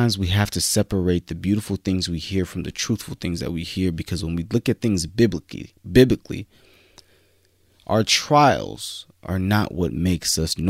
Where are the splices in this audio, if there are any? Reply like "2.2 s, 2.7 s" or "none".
none